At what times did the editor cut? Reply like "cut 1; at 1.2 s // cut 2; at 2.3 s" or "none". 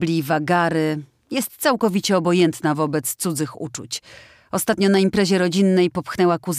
none